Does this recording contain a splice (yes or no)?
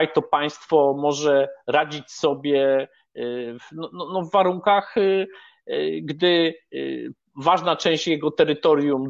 no